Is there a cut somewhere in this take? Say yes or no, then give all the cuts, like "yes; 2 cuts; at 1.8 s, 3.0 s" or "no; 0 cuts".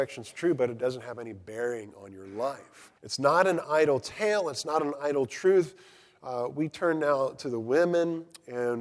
yes; 1 cut; at 3.0 s